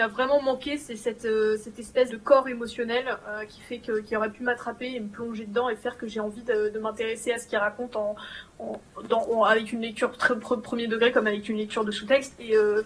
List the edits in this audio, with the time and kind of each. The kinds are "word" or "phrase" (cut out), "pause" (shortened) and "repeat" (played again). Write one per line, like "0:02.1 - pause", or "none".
0:02.1 - word